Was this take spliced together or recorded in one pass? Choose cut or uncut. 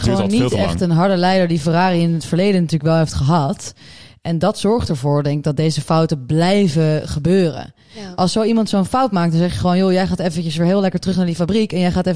uncut